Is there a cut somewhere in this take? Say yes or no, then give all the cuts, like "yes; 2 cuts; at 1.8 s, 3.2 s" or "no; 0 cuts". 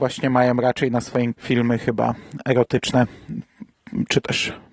yes; 1 cut; at 1.3 s